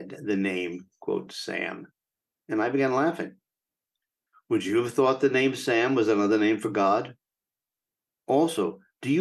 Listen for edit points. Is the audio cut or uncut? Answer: uncut